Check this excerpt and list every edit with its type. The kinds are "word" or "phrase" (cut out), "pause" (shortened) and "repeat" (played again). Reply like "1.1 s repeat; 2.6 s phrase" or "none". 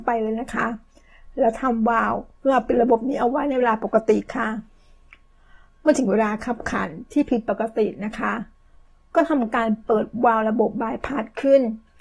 none